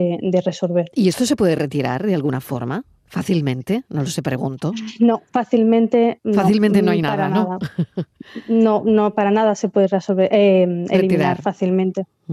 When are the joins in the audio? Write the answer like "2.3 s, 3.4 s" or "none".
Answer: none